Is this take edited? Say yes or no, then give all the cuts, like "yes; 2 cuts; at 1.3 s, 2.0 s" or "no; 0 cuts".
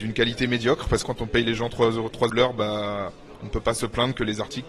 yes; 2 cuts; at 1.0 s, 2.3 s